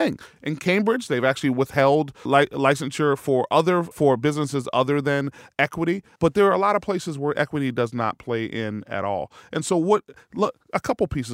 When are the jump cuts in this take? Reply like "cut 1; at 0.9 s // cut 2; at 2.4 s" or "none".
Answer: cut 1; at 2.3 s // cut 2; at 3.9 s // cut 3; at 6.2 s